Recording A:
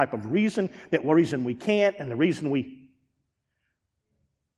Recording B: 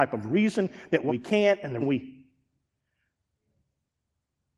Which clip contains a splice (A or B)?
B